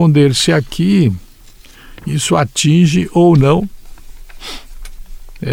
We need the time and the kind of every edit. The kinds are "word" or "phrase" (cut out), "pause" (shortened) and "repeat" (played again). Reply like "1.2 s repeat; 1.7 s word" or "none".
none